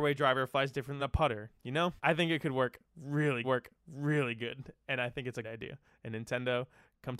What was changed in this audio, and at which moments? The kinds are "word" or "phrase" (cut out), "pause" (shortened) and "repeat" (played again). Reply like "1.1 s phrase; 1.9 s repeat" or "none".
1.0 s word; 2.0 s pause; 3.4 s repeat; 5.4 s word